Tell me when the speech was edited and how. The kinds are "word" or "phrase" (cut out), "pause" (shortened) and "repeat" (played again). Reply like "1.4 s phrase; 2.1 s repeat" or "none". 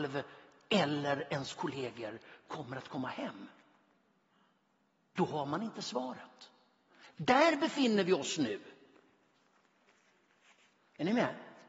none